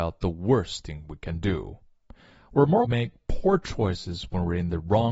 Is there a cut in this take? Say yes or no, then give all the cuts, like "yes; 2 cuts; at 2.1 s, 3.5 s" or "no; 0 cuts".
yes; 1 cut; at 2.8 s